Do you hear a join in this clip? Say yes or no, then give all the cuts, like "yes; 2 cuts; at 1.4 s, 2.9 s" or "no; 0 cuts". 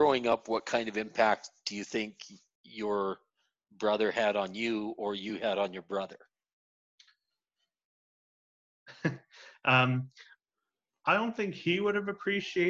no; 0 cuts